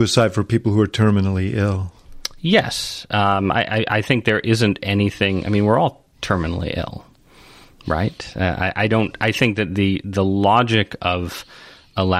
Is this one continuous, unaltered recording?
yes; 0 cuts

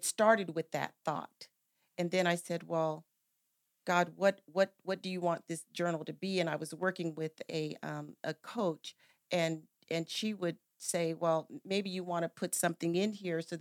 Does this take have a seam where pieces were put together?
no; 0 cuts

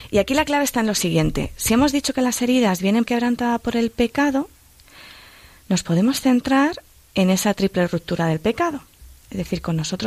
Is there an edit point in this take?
yes; 1 cut; at 3.1 s

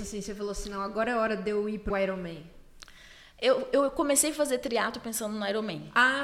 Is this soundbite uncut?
no; 1 cut; at 1.9 s

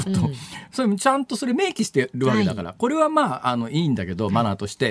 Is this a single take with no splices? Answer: yes; 0 cuts

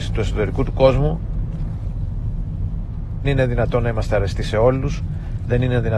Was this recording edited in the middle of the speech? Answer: yes; 1 cut; at 3.2 s

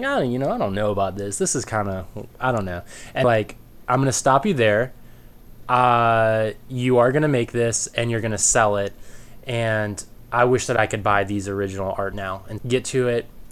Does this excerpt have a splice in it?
yes; 3 cuts; at 3.2 s, 12.1 s, 12.6 s

